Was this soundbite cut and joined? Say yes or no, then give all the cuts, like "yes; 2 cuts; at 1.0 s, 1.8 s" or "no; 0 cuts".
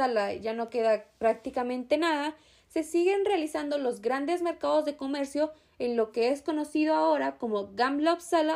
no; 0 cuts